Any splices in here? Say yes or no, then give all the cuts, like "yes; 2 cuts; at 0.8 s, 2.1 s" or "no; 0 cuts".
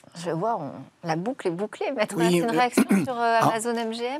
no; 0 cuts